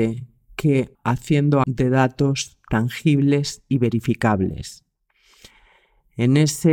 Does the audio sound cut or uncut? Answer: cut